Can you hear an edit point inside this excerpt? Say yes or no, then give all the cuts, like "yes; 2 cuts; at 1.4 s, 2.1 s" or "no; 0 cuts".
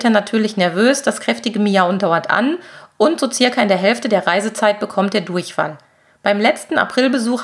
no; 0 cuts